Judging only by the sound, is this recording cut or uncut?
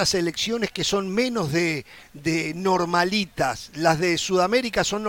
uncut